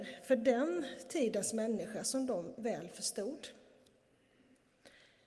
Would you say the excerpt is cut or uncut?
uncut